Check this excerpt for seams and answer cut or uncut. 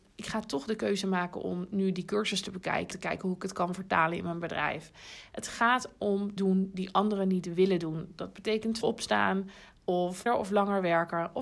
cut